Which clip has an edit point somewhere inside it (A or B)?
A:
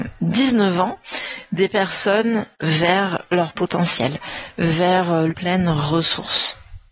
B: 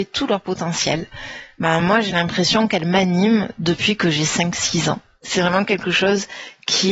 A